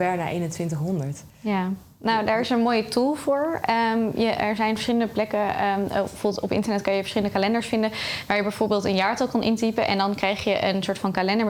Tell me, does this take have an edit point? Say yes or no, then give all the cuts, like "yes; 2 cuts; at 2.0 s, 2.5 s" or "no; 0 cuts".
yes; 1 cut; at 1.3 s